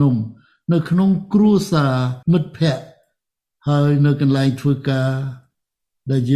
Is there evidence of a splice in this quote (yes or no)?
yes